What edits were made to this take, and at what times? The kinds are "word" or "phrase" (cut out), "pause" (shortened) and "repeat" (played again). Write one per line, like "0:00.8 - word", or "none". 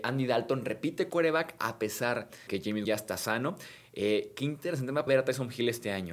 0:01.1 - word
0:02.5 - word
0:02.8 - word
0:05.1 - word